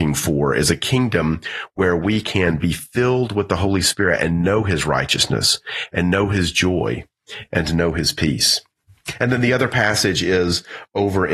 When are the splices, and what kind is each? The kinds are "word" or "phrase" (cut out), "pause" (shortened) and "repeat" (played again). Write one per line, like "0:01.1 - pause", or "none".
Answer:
none

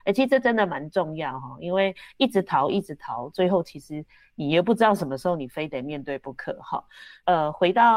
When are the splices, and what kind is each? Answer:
none

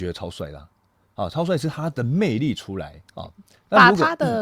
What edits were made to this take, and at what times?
0:03.1 - pause

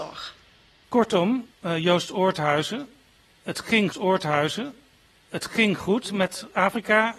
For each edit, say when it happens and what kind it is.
0:03.9 - repeat

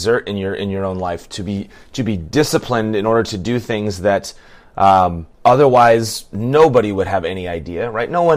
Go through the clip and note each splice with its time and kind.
0:05.3 - pause

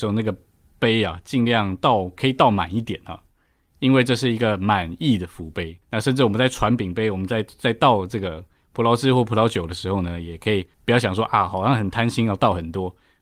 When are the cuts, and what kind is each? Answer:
0:05.8 - pause
0:10.7 - pause

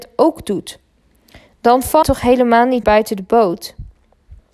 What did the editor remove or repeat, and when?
0:02.0 - word
0:02.8 - word

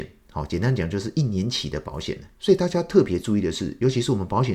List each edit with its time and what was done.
none

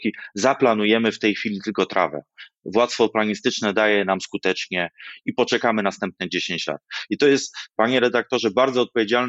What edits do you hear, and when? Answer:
none

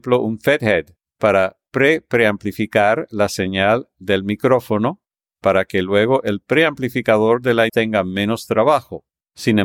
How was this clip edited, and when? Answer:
0:07.7 - word

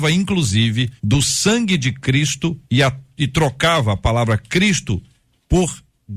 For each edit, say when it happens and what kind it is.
0:01.0 - pause
0:02.6 - pause

